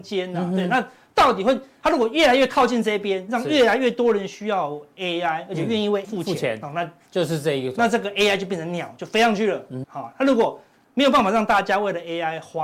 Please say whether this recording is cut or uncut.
cut